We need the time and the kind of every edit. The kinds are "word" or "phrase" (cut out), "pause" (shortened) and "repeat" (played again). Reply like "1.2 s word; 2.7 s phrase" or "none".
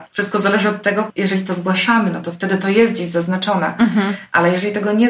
none